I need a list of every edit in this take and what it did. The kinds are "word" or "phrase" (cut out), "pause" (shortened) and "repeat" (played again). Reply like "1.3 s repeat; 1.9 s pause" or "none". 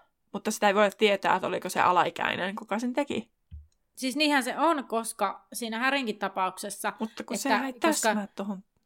3.7 s pause